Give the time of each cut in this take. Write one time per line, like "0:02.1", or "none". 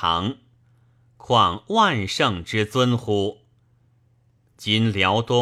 none